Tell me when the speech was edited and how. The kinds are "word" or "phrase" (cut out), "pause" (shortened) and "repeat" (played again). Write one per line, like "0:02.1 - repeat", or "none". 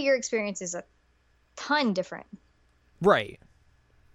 none